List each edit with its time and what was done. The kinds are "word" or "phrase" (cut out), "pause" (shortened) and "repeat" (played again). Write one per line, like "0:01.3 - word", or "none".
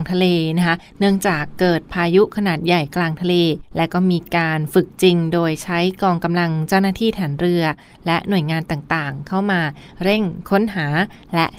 0:03.6 - pause